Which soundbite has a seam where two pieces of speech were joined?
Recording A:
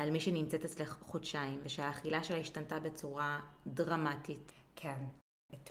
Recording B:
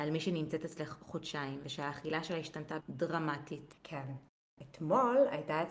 B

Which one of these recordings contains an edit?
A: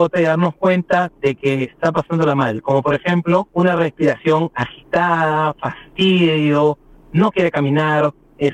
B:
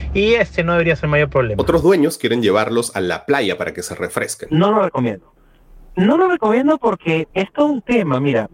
B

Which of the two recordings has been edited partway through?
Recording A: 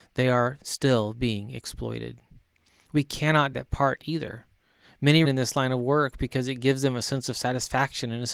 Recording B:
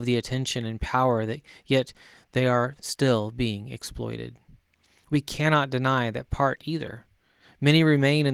A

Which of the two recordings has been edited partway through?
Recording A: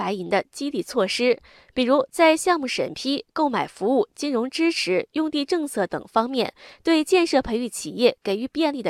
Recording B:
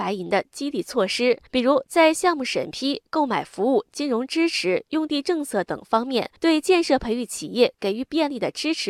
B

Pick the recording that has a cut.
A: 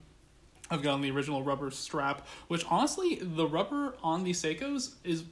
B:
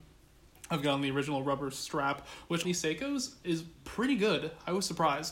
B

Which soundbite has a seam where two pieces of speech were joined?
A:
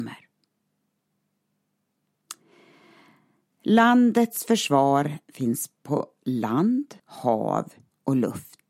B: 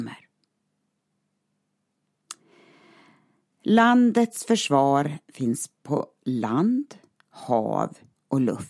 A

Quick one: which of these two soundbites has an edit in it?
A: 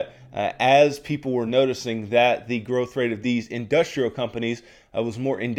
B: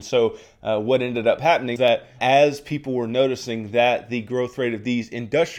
B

